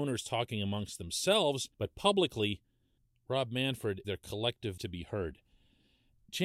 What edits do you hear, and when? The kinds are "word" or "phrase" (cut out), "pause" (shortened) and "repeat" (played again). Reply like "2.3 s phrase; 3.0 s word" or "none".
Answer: 1.7 s pause; 3.0 s pause; 4.0 s word; 4.8 s word